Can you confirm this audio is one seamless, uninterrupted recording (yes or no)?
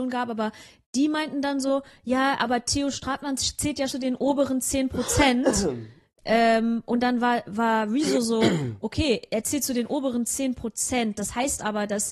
no